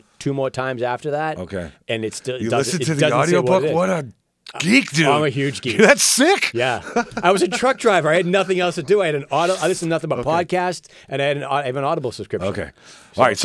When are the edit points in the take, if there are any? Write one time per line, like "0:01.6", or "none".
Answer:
none